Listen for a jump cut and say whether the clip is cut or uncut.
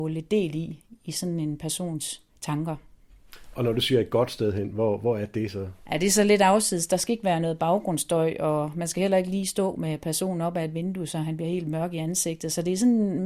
cut